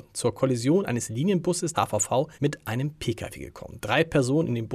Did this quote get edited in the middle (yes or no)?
yes